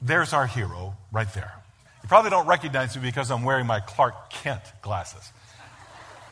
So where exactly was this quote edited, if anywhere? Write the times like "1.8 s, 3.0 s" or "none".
1.8 s